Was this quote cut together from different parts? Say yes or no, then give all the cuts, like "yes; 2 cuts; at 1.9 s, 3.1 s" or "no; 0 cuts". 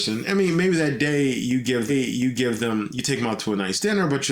yes; 1 cut; at 1.9 s